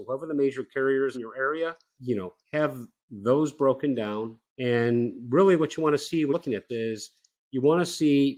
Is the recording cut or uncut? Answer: cut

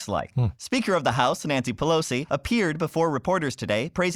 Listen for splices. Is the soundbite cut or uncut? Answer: uncut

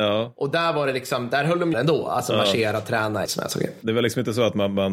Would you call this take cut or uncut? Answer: cut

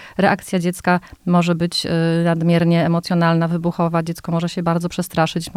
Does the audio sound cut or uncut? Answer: uncut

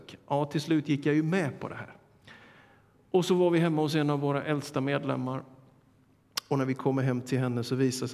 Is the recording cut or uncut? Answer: uncut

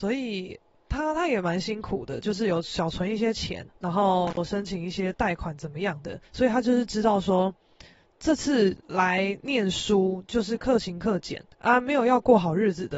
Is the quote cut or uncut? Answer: cut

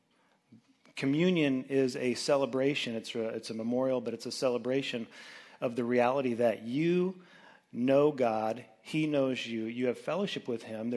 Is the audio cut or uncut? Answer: uncut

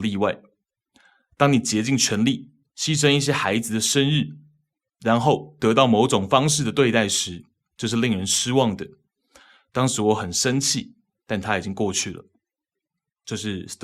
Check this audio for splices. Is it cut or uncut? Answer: cut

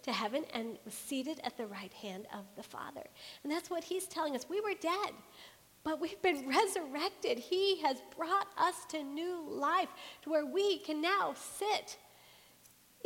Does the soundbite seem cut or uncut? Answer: uncut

